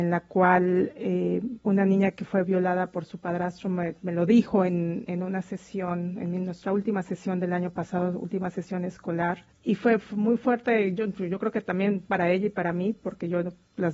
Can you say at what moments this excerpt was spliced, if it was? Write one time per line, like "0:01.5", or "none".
0:09.5